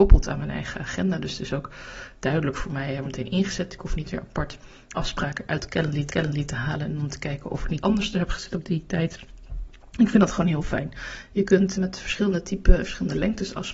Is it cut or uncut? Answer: cut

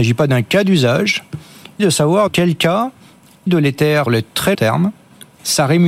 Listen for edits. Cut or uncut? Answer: cut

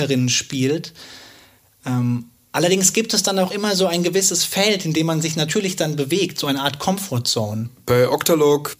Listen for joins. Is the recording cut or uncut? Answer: uncut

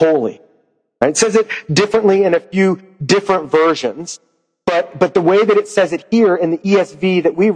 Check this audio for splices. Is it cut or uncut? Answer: uncut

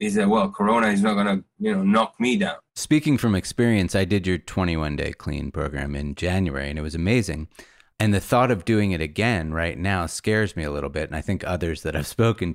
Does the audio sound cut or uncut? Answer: cut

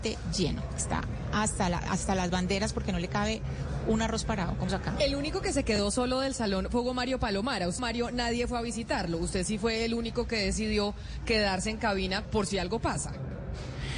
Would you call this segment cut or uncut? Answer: cut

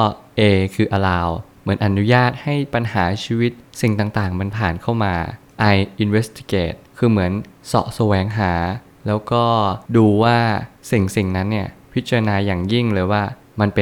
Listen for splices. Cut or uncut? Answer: cut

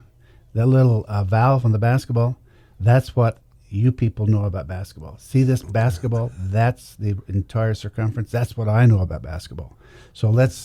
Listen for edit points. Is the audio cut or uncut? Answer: uncut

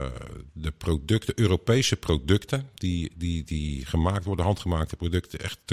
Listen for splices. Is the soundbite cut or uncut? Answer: uncut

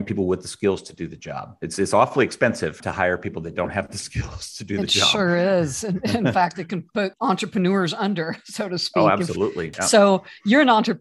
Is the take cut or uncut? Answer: uncut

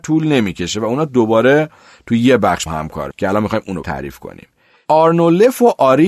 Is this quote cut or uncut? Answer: cut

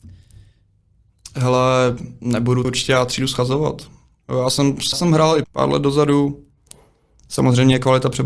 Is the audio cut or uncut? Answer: cut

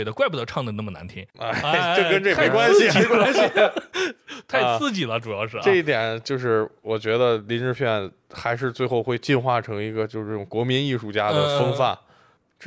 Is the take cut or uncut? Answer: uncut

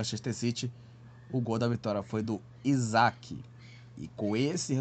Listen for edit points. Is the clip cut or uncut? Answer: uncut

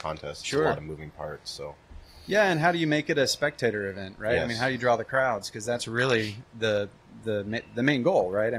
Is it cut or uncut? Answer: uncut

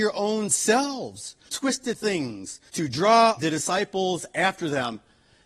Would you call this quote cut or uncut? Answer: cut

